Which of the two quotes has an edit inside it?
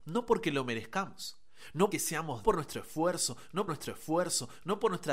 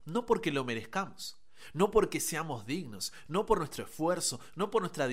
first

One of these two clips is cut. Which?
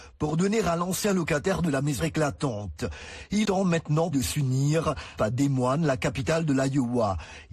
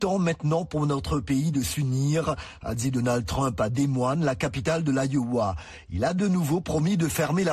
first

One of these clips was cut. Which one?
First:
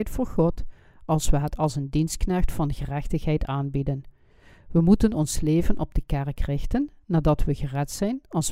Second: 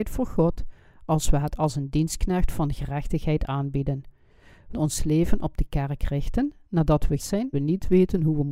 second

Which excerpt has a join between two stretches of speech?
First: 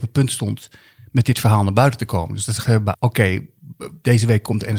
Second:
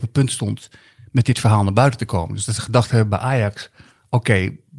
first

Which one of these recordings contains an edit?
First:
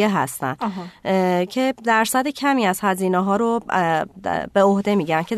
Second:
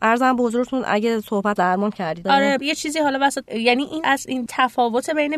second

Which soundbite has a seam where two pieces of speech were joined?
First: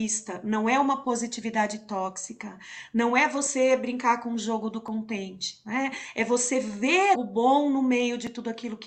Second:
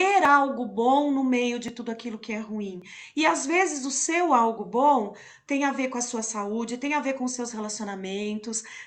first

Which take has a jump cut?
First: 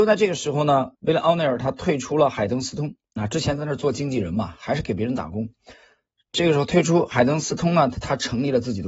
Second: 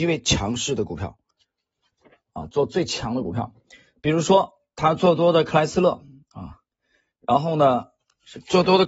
first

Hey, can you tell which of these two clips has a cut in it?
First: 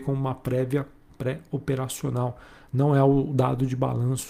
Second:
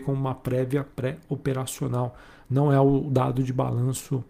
second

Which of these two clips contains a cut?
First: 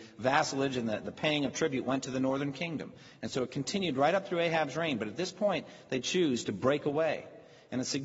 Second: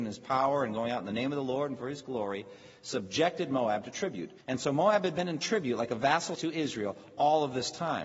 second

